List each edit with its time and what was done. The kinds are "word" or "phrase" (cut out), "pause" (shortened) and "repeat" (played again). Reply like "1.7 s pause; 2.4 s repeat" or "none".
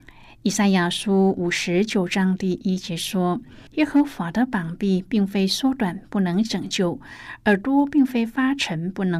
3.7 s pause